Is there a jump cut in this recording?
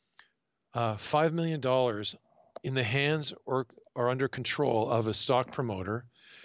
no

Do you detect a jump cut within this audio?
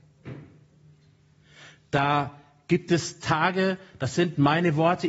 no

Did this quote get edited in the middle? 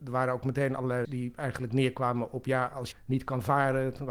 yes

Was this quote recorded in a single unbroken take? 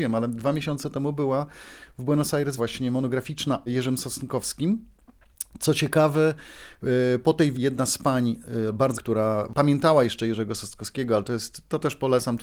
no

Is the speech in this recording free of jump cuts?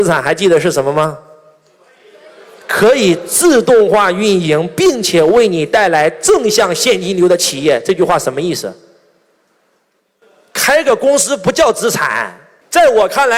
yes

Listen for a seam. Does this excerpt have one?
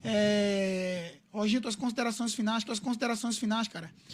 yes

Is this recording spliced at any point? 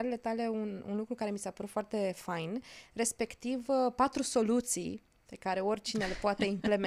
no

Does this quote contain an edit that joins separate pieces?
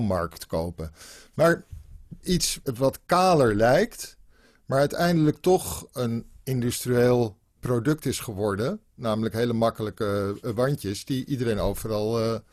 yes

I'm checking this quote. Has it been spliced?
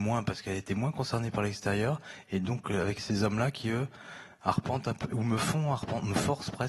no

